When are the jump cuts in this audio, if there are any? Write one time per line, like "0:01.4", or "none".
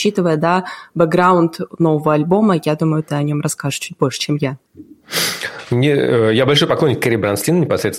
none